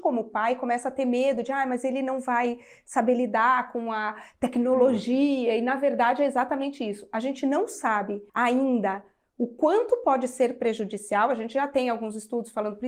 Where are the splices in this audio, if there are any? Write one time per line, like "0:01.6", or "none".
0:08.3